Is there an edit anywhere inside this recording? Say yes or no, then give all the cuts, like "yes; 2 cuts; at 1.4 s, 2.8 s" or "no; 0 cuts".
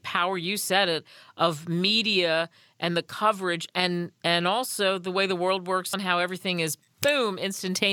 yes; 1 cut; at 5.9 s